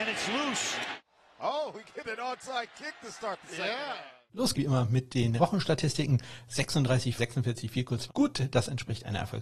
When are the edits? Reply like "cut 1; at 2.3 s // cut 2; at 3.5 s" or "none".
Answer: cut 1; at 4.5 s // cut 2; at 5.4 s // cut 3; at 7.2 s // cut 4; at 8.1 s